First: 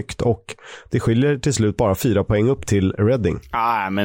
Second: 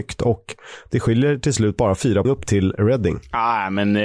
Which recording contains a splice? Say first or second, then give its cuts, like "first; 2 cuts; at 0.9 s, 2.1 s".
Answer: second; 1 cut; at 2.2 s